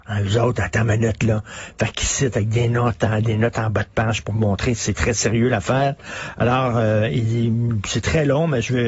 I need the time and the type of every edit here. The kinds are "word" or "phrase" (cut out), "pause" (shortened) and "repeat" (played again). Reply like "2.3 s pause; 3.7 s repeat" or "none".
4.8 s word